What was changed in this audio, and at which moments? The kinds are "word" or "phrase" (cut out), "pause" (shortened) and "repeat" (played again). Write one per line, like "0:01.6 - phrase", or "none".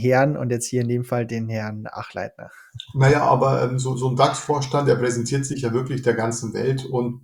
none